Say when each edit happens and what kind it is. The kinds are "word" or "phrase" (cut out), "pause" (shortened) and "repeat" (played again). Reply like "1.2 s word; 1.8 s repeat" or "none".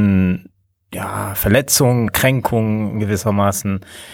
2.1 s word